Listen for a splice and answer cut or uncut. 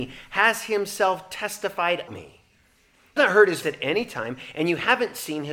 cut